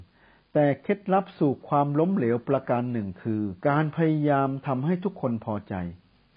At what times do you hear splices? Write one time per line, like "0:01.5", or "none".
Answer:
0:03.6